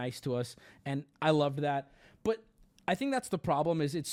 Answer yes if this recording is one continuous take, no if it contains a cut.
yes